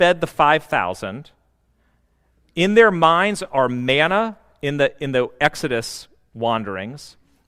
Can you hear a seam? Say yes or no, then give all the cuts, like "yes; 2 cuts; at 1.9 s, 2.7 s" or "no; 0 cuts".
no; 0 cuts